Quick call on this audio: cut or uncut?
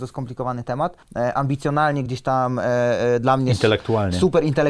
uncut